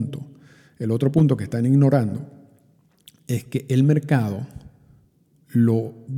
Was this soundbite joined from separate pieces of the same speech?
no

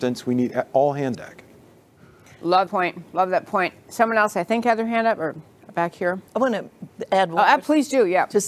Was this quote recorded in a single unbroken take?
no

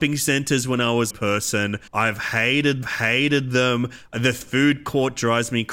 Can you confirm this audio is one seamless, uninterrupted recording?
no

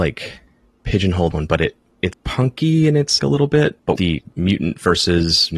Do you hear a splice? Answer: yes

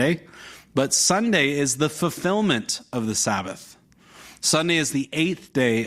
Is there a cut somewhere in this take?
no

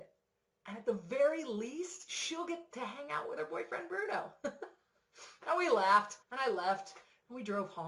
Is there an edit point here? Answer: yes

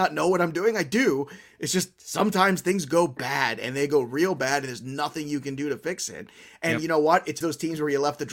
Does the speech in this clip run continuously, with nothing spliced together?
no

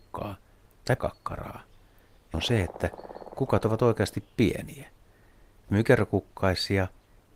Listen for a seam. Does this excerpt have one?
yes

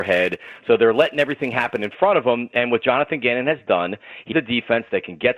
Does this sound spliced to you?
yes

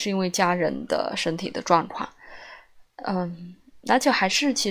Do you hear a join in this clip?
no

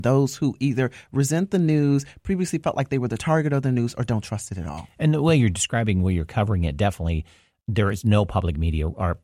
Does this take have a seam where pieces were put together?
no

